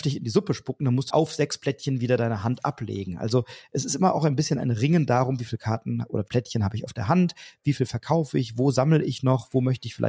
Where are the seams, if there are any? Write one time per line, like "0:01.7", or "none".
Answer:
0:01.1
0:06.3